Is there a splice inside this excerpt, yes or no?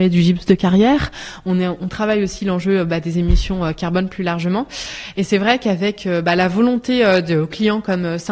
no